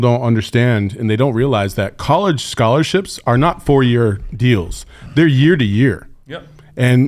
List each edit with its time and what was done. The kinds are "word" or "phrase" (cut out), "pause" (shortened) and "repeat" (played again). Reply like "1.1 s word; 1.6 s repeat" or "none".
none